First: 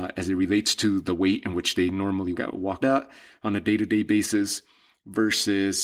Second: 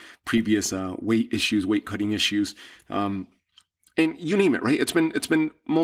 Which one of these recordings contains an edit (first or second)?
first